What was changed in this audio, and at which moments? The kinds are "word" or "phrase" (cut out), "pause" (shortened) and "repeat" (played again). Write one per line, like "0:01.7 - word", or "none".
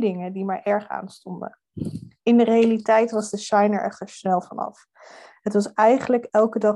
none